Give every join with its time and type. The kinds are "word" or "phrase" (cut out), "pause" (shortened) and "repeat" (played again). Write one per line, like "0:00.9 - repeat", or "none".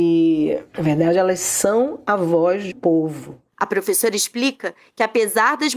0:02.7 - word